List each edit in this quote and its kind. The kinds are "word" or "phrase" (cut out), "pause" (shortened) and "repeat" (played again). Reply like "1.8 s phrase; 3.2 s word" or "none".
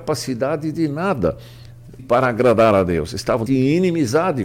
2.0 s word; 3.5 s word